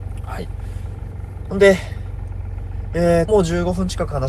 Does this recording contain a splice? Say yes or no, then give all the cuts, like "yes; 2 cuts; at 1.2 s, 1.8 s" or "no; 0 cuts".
yes; 1 cut; at 3.3 s